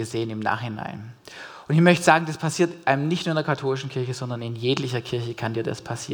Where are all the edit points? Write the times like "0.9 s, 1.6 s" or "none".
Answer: none